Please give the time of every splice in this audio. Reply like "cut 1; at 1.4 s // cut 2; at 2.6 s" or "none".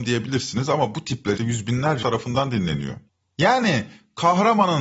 cut 1; at 1.4 s // cut 2; at 2.0 s